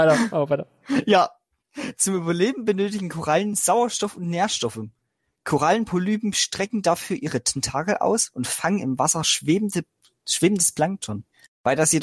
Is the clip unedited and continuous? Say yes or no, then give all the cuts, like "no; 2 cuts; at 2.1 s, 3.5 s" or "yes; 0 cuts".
yes; 0 cuts